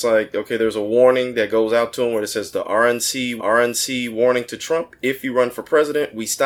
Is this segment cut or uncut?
cut